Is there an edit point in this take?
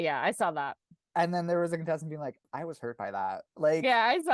yes; 1 cut; at 2.4 s

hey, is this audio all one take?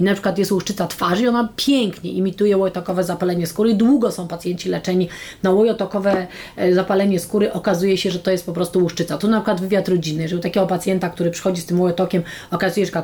yes; 0 cuts

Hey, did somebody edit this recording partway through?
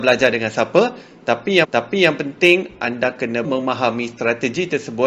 yes; 2 cuts; at 1.6 s, 3.4 s

